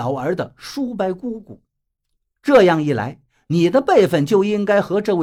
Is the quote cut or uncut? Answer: uncut